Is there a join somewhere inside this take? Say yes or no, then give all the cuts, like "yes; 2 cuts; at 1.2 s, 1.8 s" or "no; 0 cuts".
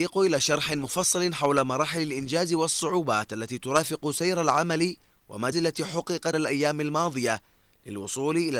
yes; 2 cuts; at 5.5 s, 6.3 s